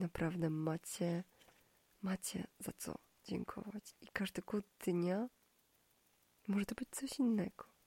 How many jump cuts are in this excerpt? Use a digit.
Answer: 0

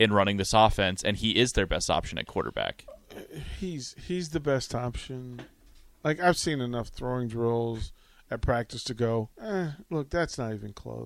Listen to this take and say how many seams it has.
1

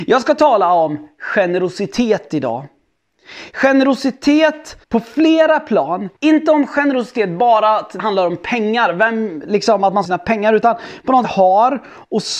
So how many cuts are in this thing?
5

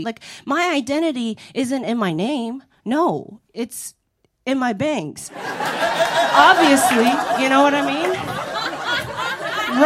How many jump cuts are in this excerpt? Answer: 0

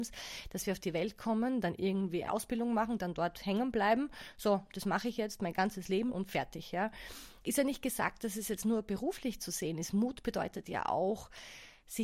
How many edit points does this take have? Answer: 2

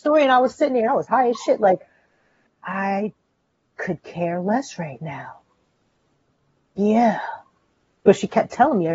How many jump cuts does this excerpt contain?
0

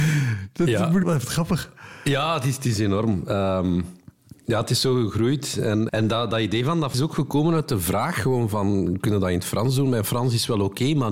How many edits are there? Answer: 3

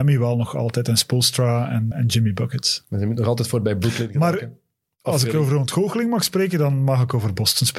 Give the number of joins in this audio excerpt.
1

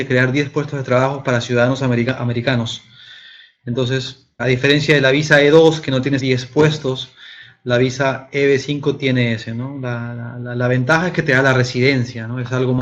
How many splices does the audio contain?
2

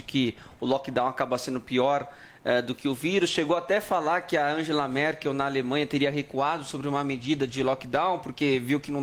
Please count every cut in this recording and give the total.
0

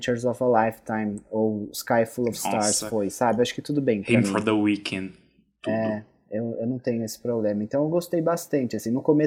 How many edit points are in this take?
0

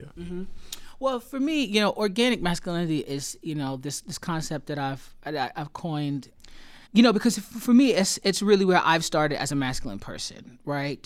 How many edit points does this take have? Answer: 1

